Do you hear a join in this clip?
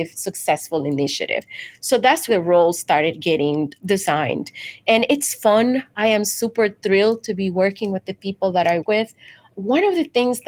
yes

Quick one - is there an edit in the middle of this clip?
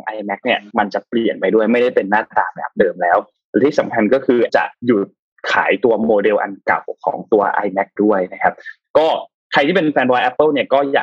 yes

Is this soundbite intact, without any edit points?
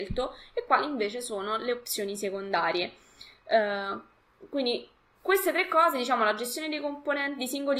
yes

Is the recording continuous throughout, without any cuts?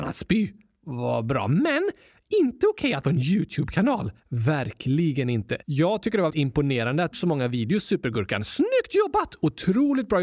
no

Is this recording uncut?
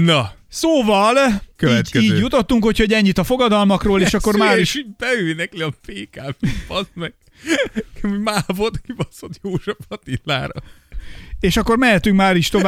yes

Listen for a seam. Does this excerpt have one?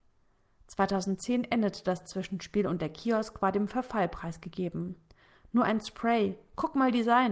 no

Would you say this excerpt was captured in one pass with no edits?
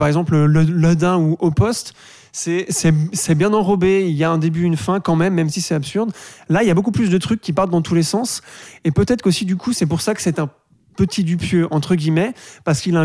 yes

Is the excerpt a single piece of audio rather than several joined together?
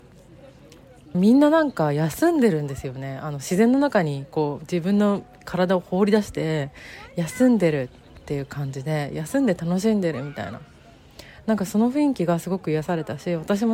no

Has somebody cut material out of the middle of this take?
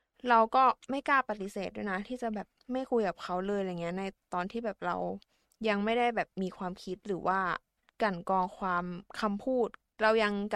no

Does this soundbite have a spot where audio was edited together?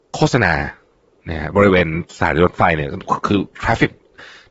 yes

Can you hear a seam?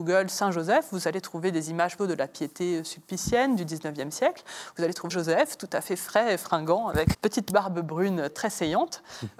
yes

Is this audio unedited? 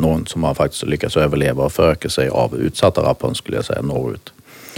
yes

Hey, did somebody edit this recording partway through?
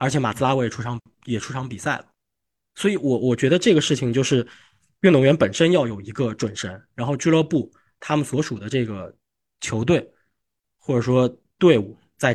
no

